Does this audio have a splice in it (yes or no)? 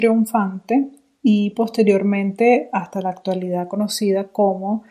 no